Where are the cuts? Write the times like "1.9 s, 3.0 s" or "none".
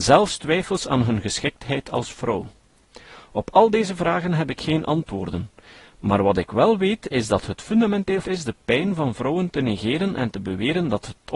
8.2 s